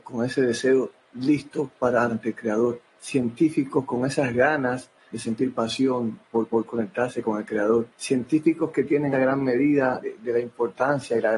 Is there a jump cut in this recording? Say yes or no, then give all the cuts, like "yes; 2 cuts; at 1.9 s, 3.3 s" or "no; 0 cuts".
yes; 7 cuts; at 2.1 s, 2.9 s, 5.1 s, 6.5 s, 7.9 s, 9.1 s, 10.0 s